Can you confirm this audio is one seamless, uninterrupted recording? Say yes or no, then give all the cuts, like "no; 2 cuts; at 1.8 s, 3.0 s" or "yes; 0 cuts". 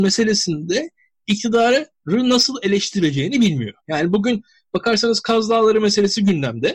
no; 1 cut; at 3.8 s